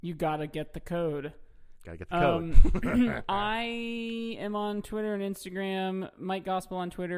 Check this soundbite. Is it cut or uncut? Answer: uncut